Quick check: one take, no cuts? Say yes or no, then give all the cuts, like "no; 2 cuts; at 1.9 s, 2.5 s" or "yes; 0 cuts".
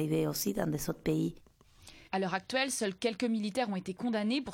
no; 1 cut; at 2.1 s